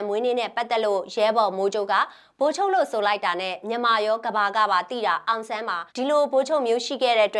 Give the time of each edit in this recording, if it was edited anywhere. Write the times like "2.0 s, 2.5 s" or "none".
5.9 s